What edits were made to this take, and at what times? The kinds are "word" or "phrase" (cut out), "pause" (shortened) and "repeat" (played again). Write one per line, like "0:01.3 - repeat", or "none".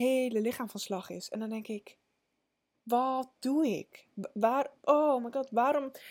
none